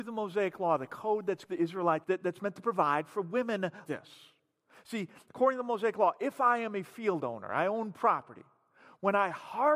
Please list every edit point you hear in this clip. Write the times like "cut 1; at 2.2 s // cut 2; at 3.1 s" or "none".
cut 1; at 1.4 s // cut 2; at 2.0 s // cut 3; at 3.9 s